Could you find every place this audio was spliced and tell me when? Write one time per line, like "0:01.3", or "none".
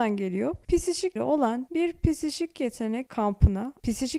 0:01.2
0:01.7